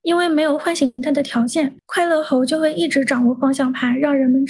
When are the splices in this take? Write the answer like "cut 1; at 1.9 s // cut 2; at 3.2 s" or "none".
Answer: cut 1; at 1.8 s